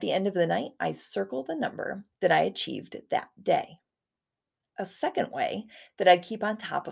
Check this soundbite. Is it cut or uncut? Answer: uncut